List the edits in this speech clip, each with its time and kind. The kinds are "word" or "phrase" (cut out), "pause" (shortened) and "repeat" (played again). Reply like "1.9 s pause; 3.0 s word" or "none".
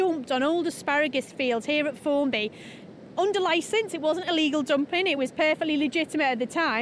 none